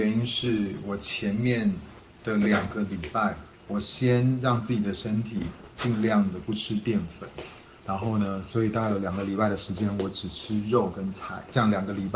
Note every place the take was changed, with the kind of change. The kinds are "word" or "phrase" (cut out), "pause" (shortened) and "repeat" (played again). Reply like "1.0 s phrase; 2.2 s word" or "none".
3.6 s pause; 7.8 s pause